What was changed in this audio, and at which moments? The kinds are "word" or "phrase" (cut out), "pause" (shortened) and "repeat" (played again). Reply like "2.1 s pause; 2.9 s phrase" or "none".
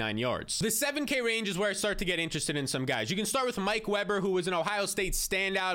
none